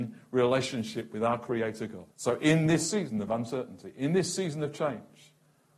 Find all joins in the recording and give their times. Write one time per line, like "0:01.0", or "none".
0:02.1